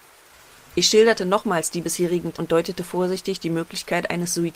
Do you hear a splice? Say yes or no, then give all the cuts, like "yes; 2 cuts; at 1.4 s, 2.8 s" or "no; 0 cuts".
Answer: yes; 1 cut; at 2.3 s